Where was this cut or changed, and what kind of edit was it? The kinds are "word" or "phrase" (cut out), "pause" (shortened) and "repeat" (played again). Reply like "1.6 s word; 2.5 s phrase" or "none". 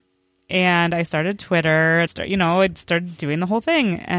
2.1 s word